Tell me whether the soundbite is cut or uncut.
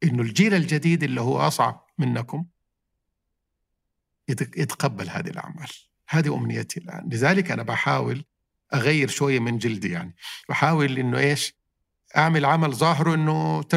uncut